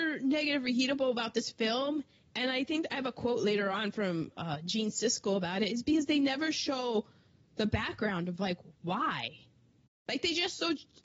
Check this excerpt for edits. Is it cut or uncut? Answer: uncut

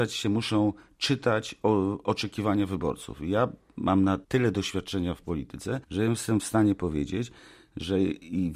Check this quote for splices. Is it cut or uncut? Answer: cut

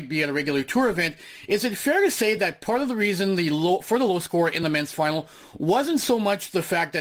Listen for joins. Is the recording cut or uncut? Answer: uncut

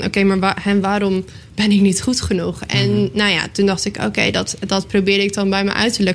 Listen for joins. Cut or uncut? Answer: uncut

